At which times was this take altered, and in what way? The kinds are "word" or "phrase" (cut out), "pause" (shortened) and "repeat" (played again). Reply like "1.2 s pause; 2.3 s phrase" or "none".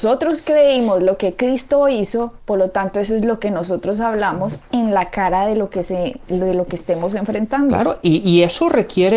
none